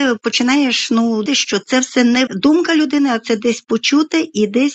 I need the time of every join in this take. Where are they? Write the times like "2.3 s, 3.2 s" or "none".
1.3 s, 2.3 s

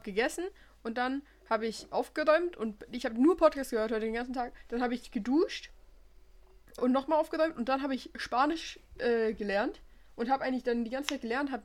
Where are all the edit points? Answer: 6.8 s

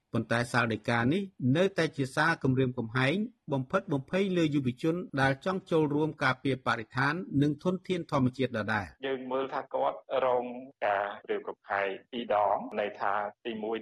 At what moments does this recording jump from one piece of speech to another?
9.0 s

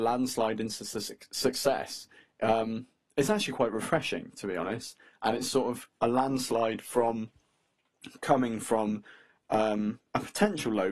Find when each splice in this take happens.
none

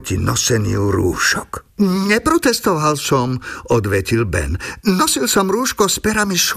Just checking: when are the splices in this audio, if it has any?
1.7 s

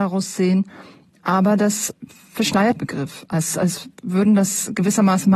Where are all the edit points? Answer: 2.8 s, 3.9 s

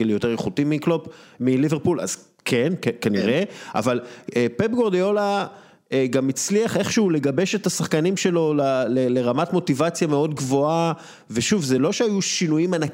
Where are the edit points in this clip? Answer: none

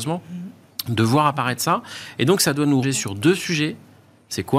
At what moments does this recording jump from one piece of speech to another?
2.8 s

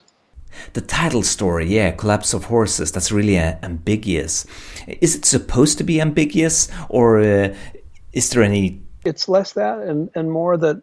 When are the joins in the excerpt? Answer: none

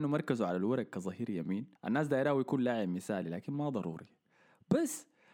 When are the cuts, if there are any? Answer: 1.8 s

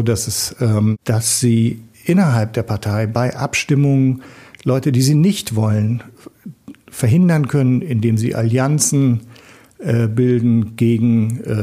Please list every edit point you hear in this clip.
none

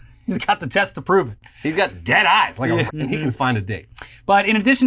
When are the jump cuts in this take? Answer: 2.9 s, 3.3 s

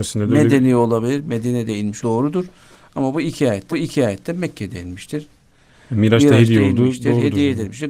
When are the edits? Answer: 2.0 s, 3.7 s

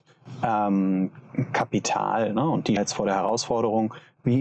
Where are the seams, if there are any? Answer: 2.8 s

